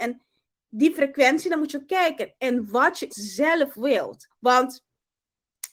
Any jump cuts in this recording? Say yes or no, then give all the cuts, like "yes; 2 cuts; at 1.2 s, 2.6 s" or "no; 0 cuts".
yes; 2 cuts; at 3.1 s, 4.3 s